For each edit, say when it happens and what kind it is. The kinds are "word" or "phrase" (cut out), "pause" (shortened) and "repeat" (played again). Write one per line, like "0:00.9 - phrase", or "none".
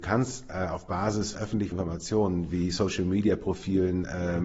0:01.3 - word
0:01.7 - word